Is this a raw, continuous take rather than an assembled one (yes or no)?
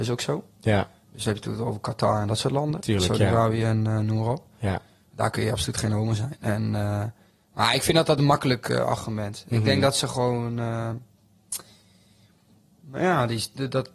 yes